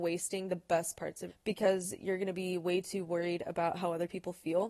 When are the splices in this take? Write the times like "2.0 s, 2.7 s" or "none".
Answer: 1.3 s

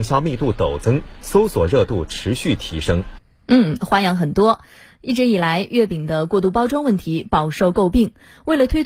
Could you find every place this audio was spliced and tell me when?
none

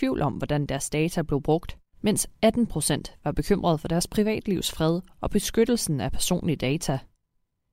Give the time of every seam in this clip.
1.9 s

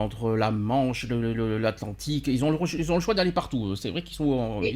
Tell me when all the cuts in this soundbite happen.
none

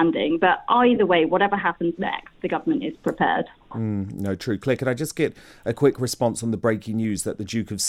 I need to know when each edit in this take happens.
none

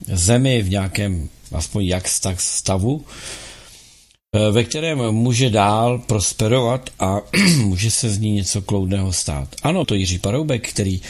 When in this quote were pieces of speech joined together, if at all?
9.8 s

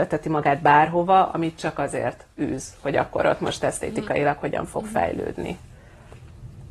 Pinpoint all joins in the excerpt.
none

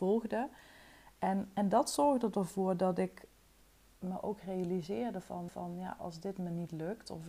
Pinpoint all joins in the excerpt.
3.8 s, 5.5 s

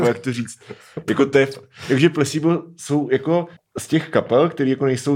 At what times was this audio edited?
3.6 s

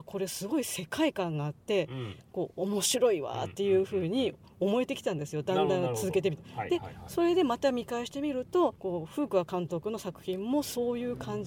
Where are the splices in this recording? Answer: 8.7 s

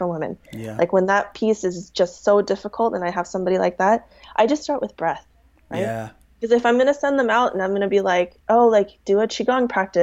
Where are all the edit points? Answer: none

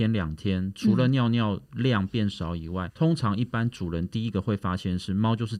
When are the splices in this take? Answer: 2.9 s

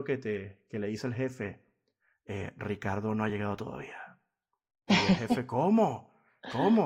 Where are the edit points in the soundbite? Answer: none

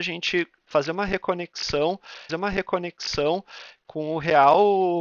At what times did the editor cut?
2.3 s

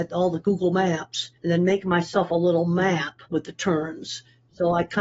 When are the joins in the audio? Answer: 1.4 s, 3.3 s

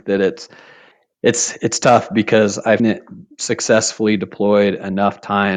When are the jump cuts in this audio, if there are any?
2.8 s

